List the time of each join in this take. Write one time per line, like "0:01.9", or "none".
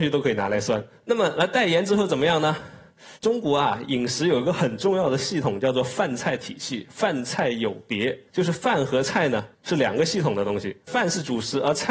0:03.2
0:08.3
0:09.5
0:10.8